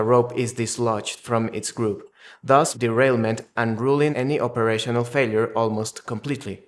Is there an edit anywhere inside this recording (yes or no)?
yes